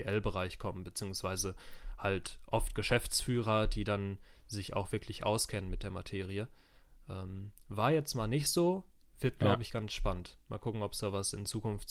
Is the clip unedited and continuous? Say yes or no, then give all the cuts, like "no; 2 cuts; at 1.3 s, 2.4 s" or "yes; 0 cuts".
yes; 0 cuts